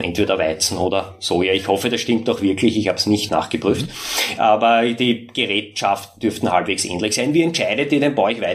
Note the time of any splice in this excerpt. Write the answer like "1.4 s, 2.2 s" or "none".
3.3 s